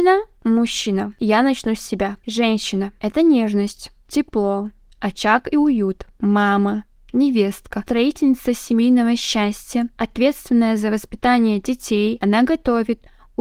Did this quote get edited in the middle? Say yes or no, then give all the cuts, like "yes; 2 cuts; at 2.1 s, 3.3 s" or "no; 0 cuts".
no; 0 cuts